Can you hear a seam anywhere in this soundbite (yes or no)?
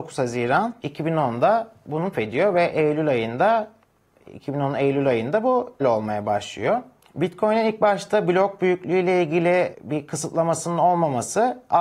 yes